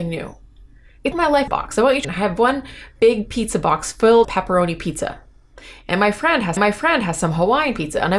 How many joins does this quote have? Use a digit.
5